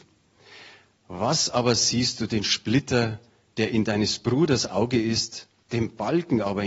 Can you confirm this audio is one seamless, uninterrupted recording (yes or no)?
yes